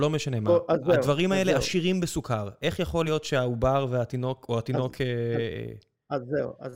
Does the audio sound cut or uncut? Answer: uncut